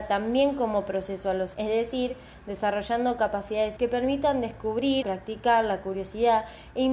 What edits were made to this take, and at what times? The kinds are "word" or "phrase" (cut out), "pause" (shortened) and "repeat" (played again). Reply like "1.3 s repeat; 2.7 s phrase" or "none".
1.5 s word; 3.8 s word; 5.0 s word